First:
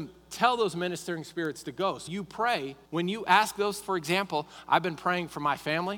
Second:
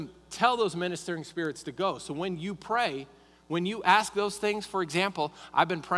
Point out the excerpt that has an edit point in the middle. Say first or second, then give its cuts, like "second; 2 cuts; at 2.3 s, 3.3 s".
first; 3 cuts; at 2.1 s, 2.9 s, 3.8 s